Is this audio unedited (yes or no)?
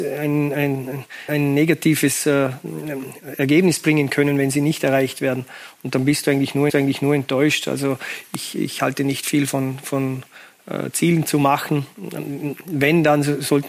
no